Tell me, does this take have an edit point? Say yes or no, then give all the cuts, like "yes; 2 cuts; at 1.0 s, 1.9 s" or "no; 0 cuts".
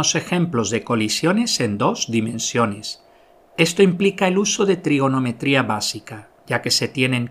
no; 0 cuts